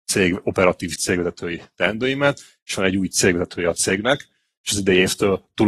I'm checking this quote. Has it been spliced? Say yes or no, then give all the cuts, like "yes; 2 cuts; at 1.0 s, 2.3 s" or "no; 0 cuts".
no; 0 cuts